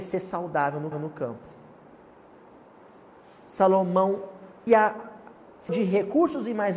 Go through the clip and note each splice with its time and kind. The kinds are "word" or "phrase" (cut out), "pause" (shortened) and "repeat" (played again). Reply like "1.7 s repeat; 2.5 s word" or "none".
0.9 s repeat; 4.7 s word; 5.7 s word